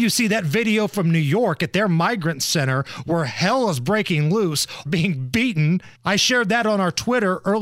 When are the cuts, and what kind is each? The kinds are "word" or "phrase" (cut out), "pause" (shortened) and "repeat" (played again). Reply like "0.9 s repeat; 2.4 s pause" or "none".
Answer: 4.9 s phrase; 5.9 s pause